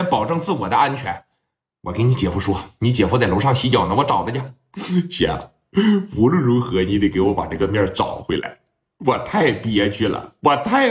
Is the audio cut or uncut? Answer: uncut